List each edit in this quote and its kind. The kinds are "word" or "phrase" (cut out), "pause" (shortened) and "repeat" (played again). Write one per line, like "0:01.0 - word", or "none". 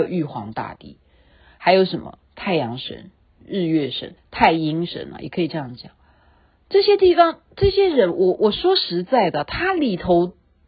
0:04.2 - phrase